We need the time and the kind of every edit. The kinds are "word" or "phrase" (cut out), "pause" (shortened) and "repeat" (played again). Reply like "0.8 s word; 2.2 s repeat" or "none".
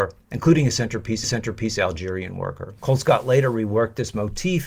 1.2 s repeat; 2.8 s pause